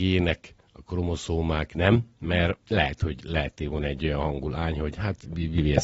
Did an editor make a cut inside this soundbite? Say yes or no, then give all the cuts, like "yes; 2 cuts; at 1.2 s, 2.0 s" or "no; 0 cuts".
yes; 1 cut; at 2.6 s